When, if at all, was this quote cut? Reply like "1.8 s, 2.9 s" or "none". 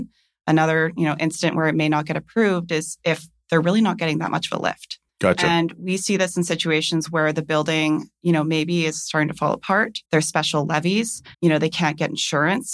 5.1 s, 10.1 s, 11.3 s